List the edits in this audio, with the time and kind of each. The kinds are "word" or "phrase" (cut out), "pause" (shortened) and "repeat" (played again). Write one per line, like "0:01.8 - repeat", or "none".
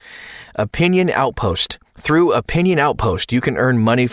0:01.9 - pause